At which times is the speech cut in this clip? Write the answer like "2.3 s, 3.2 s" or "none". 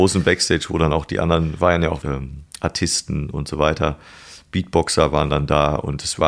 2.0 s